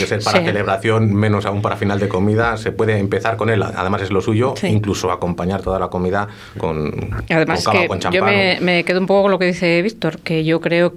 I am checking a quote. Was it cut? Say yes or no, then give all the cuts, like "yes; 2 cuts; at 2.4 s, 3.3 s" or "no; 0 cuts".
no; 0 cuts